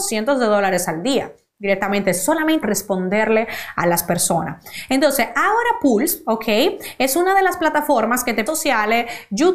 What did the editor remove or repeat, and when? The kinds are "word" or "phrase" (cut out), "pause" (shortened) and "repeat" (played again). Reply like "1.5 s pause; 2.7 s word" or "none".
2.6 s word; 8.5 s phrase